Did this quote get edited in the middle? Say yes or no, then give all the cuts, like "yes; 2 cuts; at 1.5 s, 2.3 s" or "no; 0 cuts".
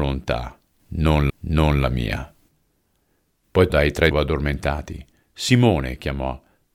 yes; 3 cuts; at 1.3 s, 3.7 s, 4.1 s